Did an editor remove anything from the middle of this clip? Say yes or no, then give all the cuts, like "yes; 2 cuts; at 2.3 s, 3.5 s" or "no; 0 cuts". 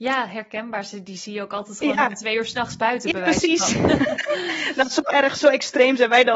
no; 0 cuts